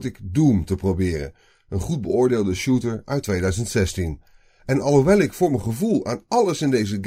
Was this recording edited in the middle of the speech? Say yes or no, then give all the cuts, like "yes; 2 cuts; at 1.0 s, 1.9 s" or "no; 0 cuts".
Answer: no; 0 cuts